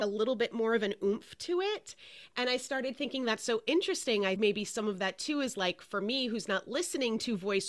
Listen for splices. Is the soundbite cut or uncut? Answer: uncut